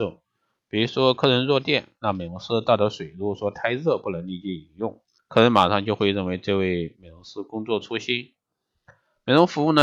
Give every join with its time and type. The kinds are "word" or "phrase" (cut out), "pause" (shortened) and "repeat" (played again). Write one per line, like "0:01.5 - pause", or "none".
0:05.2 - pause